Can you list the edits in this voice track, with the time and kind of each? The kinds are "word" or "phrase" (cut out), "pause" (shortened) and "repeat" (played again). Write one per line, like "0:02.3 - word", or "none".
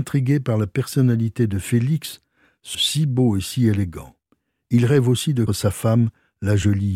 0:02.7 - word
0:05.5 - word